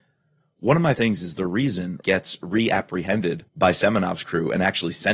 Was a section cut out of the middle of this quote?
yes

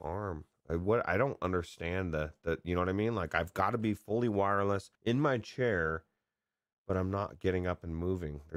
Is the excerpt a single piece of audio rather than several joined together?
no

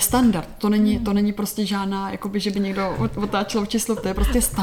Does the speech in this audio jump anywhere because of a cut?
no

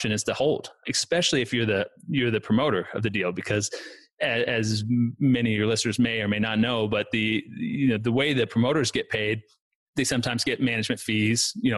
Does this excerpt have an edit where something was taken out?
no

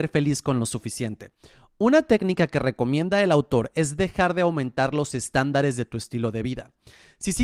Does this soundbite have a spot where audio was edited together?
no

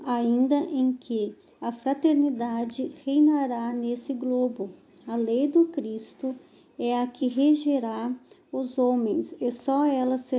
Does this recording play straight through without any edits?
yes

